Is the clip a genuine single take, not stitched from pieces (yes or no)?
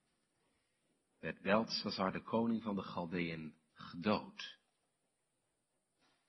no